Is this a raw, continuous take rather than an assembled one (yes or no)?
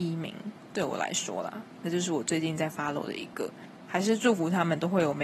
no